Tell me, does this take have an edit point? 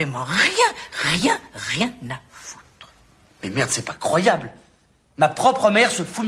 no; 0 cuts

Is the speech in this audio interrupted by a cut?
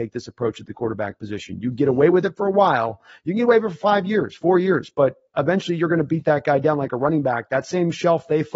no; 0 cuts

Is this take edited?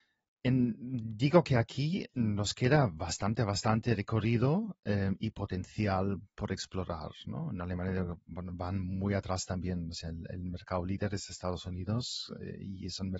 no; 0 cuts

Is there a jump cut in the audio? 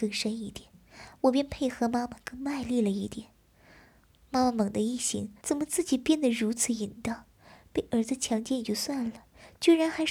yes; 1 cut; at 5.4 s

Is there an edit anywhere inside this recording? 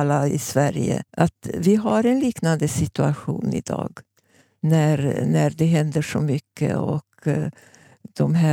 yes; 1 cut; at 1.1 s

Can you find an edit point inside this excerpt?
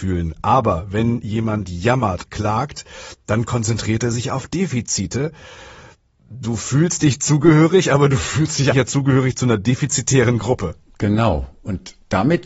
yes; 2 cuts; at 2.3 s, 8.7 s

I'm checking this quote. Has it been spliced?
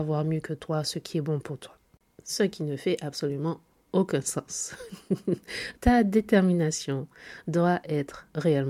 yes; 1 cut; at 5.7 s

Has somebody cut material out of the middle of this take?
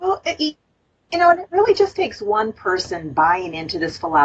no; 0 cuts

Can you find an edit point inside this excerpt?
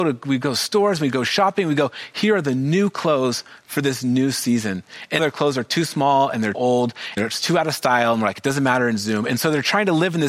yes; 3 cuts; at 5.2 s, 6.5 s, 7.2 s

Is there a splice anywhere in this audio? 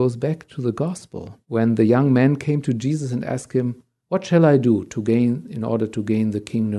yes; 2 cuts; at 1.4 s, 4.0 s

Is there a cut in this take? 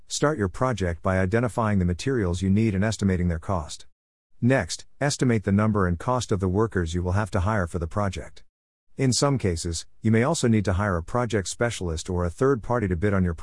no; 0 cuts

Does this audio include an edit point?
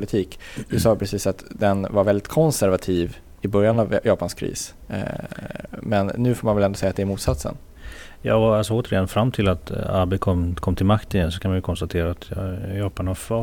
no; 0 cuts

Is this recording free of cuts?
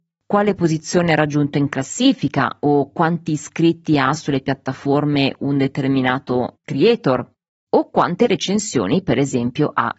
yes; 0 cuts

